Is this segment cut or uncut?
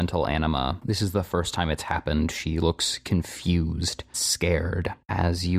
cut